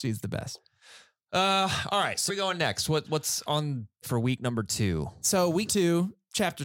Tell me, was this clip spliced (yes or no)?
yes